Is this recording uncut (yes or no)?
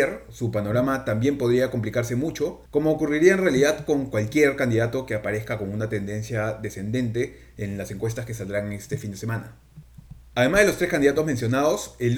no